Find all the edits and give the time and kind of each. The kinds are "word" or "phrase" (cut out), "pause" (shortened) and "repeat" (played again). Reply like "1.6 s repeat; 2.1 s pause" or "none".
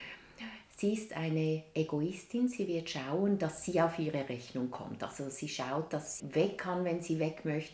6.2 s word